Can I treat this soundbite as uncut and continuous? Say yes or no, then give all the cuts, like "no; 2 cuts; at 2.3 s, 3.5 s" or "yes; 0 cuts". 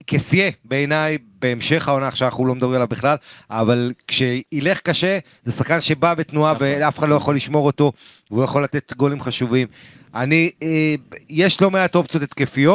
yes; 0 cuts